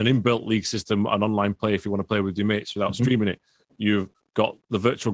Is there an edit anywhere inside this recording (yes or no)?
no